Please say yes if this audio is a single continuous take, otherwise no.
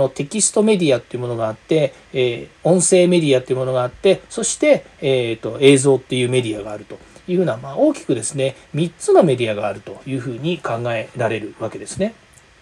yes